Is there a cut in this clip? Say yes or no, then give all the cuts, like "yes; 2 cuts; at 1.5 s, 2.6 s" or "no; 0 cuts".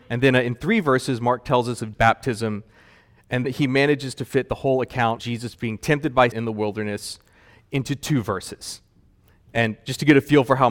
yes; 4 cuts; at 1.9 s, 3.4 s, 5.2 s, 6.3 s